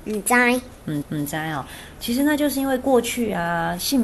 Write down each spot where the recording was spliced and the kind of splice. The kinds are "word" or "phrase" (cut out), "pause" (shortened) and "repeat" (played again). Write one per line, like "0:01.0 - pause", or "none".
0:01.0 - repeat